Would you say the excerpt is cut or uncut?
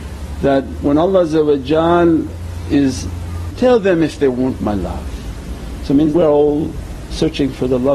cut